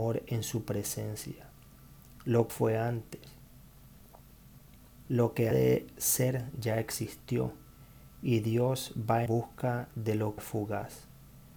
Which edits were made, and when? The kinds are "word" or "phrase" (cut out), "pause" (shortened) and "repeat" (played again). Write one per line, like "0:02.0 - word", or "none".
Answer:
0:02.5 - phrase
0:05.5 - word
0:09.3 - word
0:10.4 - word